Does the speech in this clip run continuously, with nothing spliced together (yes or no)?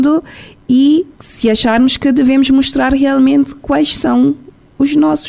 no